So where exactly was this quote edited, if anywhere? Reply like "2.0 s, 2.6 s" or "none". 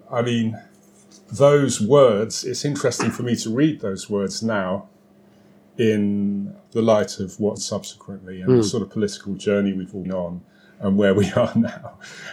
7.6 s, 10.0 s